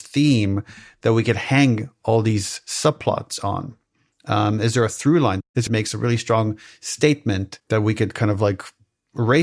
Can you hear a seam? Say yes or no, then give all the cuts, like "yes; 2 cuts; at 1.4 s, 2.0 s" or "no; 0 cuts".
yes; 1 cut; at 5.7 s